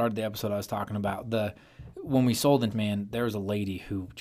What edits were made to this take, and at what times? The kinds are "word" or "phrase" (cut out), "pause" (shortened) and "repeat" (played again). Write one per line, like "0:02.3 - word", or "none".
0:02.7 - word